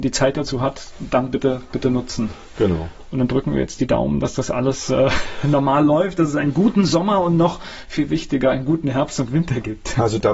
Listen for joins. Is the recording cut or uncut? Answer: uncut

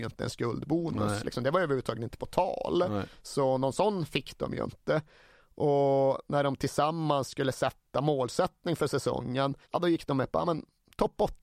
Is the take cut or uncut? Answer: cut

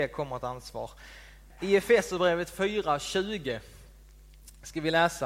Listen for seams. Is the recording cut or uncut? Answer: uncut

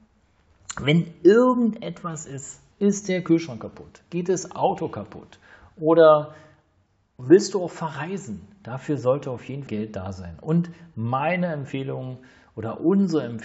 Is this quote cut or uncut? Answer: cut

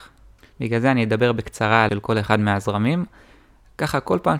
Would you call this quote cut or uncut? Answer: cut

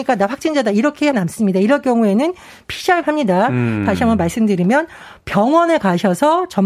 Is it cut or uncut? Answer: cut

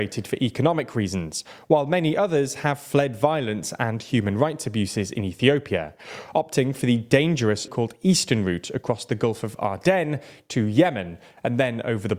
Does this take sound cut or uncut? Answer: cut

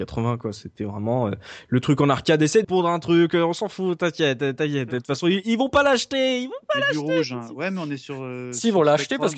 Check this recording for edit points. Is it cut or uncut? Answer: cut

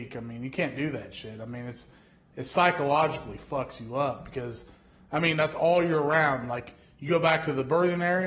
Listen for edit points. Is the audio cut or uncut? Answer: uncut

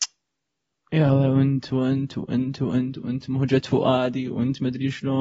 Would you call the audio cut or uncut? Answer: uncut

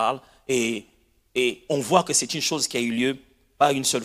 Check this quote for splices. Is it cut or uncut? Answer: uncut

